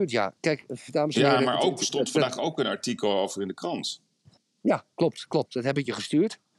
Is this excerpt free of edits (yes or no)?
yes